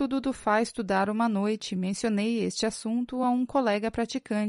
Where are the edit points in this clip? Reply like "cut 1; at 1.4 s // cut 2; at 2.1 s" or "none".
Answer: none